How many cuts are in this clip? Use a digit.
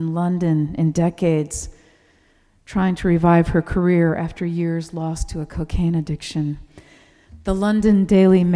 0